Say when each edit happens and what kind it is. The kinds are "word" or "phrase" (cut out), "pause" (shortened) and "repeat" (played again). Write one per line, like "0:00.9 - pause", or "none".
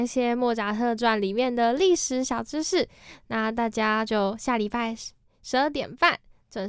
none